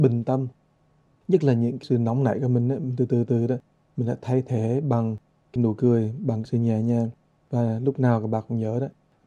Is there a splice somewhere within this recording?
no; 0 cuts

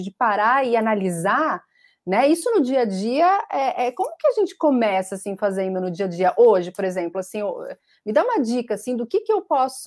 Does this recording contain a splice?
no; 0 cuts

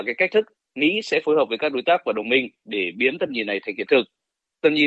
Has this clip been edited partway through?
no; 0 cuts

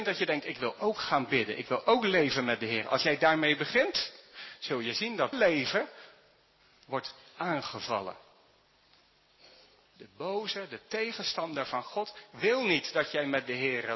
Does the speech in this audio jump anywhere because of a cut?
yes; 1 cut; at 5.3 s

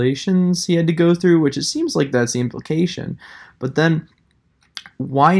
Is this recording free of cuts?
yes; 0 cuts

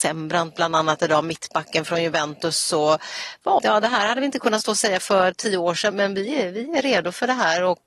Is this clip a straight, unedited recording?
no; 3 cuts; at 3.6 s, 5.0 s, 5.9 s

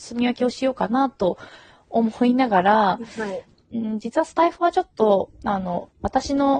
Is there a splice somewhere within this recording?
no; 0 cuts

